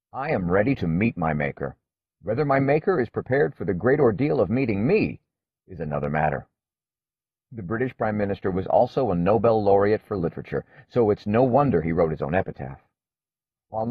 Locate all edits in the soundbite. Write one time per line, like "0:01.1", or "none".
none